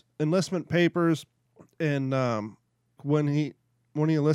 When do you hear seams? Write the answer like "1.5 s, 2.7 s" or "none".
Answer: 1.5 s, 3.0 s